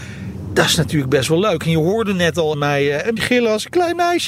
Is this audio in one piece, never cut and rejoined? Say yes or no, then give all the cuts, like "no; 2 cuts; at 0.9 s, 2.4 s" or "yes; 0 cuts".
no; 2 cuts; at 2.5 s, 3.2 s